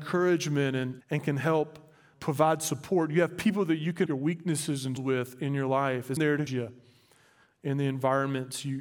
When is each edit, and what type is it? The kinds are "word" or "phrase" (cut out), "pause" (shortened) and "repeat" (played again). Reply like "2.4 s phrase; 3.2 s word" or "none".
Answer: 1.0 s word; 2.1 s word; 4.1 s word; 5.0 s word; 6.2 s word; 6.5 s word